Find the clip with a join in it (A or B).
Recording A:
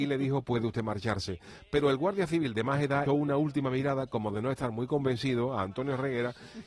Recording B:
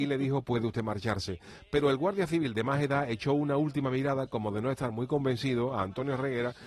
A